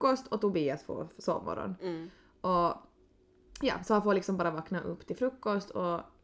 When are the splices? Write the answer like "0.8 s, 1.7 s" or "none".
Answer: none